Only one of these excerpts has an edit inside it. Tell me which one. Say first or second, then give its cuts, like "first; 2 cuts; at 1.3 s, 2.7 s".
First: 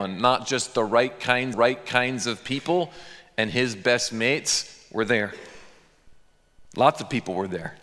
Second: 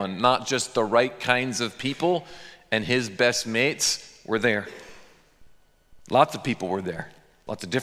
first; 1 cut; at 1.5 s